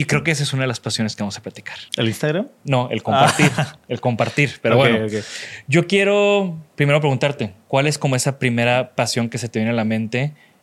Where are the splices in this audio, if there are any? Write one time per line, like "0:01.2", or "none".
0:01.9